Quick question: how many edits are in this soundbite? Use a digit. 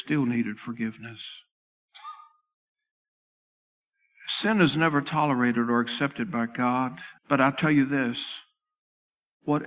1